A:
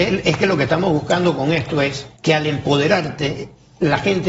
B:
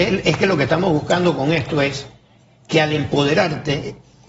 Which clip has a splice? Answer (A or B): A